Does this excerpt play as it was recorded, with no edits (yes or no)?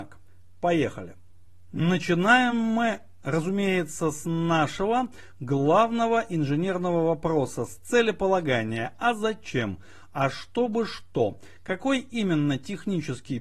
yes